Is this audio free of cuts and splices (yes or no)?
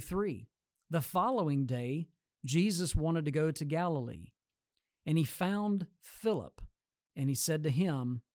yes